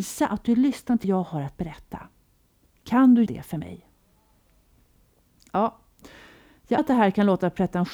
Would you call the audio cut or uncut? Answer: cut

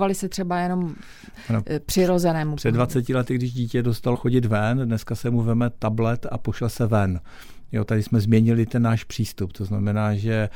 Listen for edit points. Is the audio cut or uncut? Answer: cut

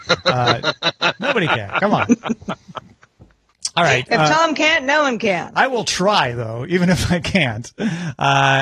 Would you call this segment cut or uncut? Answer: uncut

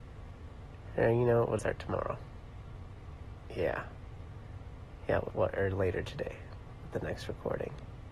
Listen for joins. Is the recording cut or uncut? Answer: cut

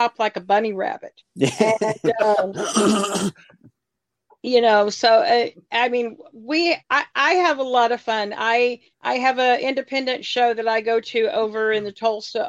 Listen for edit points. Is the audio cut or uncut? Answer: cut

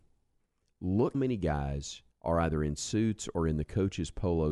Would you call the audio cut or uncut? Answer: cut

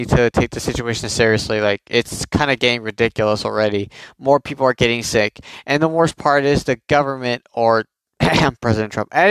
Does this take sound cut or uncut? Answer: uncut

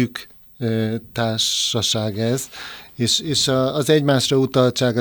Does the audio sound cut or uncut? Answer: uncut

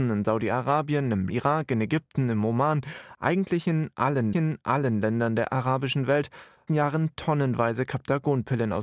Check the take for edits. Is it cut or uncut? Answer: cut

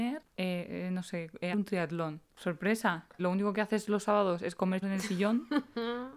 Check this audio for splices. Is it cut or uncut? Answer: cut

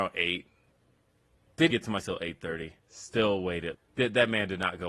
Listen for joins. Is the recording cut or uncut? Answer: cut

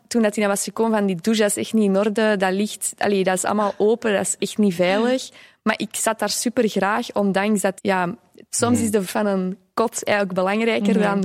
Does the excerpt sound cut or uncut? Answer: cut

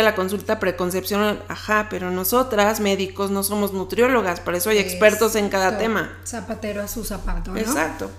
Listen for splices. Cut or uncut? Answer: uncut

